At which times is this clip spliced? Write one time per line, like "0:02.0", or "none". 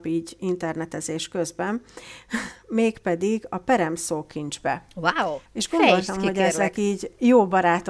0:05.5